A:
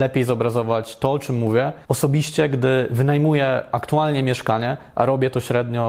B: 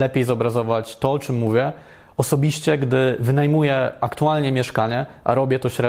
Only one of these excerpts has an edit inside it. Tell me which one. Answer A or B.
A